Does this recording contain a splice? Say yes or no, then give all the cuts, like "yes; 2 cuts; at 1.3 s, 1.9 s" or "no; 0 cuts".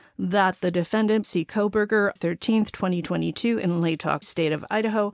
yes; 3 cuts; at 1.2 s, 2.2 s, 4.2 s